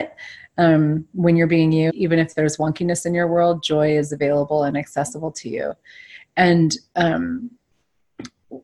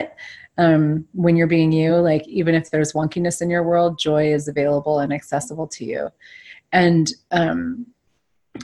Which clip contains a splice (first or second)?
first